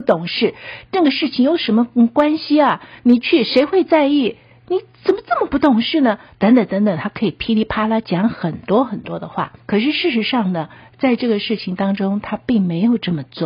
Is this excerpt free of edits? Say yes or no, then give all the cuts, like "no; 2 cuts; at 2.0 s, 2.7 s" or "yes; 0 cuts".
no; 1 cut; at 9.6 s